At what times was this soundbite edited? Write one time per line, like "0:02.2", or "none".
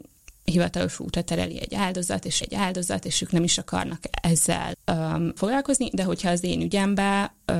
0:02.4
0:04.7
0:05.4